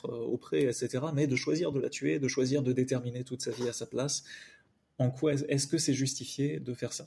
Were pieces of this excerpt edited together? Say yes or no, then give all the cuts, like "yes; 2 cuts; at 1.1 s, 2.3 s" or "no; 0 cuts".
no; 0 cuts